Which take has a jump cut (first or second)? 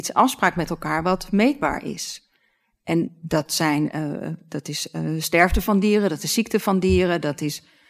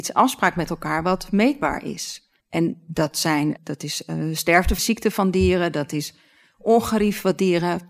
second